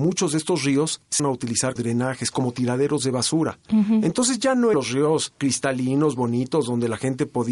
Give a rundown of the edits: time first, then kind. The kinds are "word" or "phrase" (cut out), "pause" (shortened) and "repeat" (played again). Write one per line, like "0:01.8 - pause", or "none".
0:01.2 - word
0:01.8 - word
0:04.7 - word